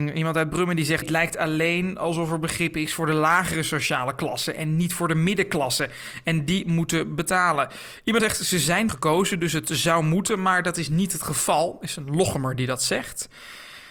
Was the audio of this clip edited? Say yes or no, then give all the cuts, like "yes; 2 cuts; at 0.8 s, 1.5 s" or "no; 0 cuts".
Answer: yes; 3 cuts; at 1.0 s, 8.2 s, 8.9 s